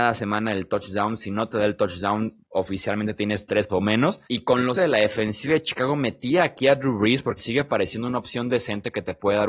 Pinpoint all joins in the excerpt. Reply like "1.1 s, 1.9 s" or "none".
3.7 s, 4.2 s, 4.7 s, 7.4 s